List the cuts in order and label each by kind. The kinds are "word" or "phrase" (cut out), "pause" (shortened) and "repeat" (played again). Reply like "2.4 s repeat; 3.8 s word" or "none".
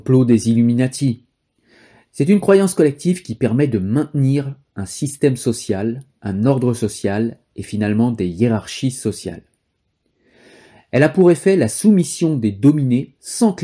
none